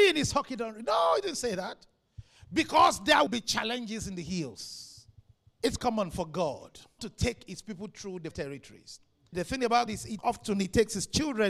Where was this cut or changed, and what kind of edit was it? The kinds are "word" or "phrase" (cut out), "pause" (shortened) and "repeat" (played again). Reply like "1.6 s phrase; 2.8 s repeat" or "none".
3.3 s word; 5.8 s word; 7.0 s word; 8.3 s word; 9.9 s word; 10.2 s word